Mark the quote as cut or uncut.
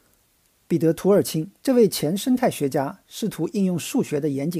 cut